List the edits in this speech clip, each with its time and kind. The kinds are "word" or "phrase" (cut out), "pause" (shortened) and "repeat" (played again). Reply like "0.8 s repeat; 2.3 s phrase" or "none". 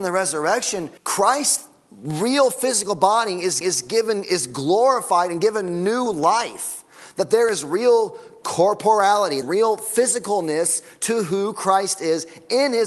1.0 s pause; 3.6 s repeat; 9.4 s word

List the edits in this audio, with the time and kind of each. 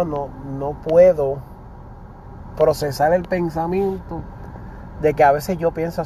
none

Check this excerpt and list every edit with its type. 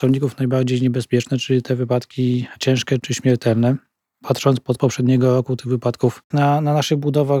4.7 s word; 6.3 s word

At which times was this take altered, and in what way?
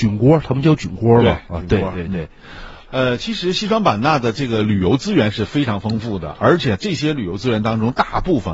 2.8 s pause

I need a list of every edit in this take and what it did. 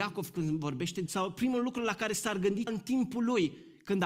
1.1 s word; 2.7 s word

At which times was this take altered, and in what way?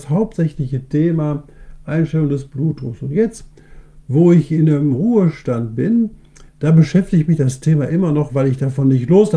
6.5 s pause

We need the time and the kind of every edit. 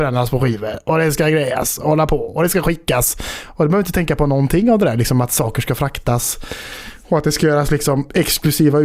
none

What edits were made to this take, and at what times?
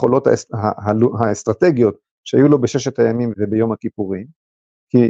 3.3 s word

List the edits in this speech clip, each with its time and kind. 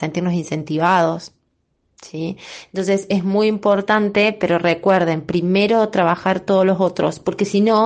none

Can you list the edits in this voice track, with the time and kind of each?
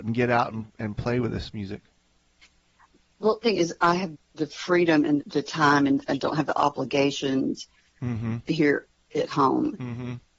3.4 s word; 4.1 s word; 5.2 s word

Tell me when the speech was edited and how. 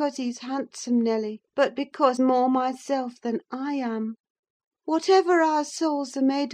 1.5 s pause; 2.2 s word; 4.3 s pause

